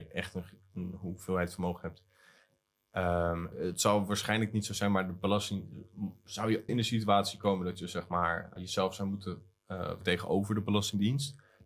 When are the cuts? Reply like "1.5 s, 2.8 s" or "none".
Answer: 3.5 s, 6.7 s, 8.6 s, 10.0 s